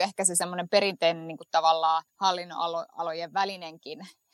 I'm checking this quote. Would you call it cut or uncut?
cut